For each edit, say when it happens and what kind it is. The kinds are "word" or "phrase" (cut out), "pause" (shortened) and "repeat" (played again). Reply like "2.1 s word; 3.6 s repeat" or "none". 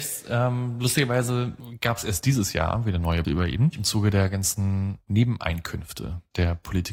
3.2 s word